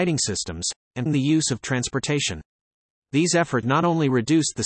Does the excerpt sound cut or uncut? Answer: cut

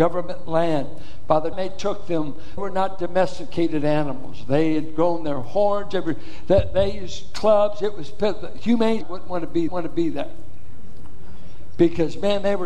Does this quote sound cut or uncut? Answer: cut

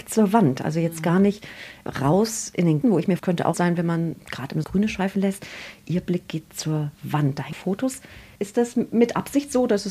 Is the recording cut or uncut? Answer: cut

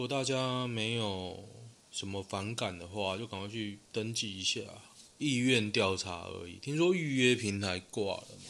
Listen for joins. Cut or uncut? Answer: cut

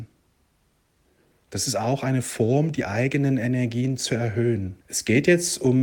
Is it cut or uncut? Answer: cut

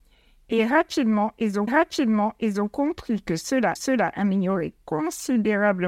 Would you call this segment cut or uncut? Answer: cut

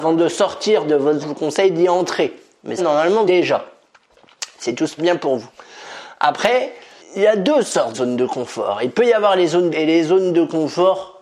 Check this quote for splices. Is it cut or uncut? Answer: cut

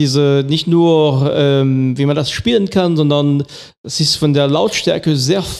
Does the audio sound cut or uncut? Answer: uncut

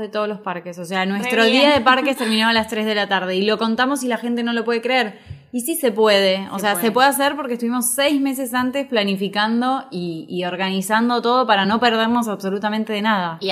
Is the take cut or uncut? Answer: uncut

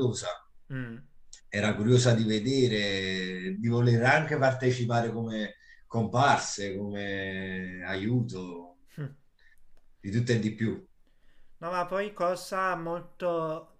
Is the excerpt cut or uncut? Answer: uncut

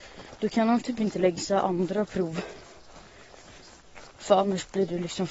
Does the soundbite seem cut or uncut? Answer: cut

